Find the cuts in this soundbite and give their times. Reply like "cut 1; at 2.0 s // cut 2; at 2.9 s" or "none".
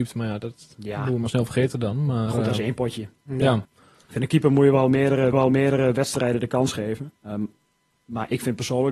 cut 1; at 3.6 s // cut 2; at 5.3 s // cut 3; at 7.2 s